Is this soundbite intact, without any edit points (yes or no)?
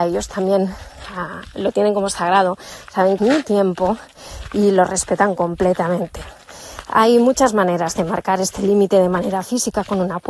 no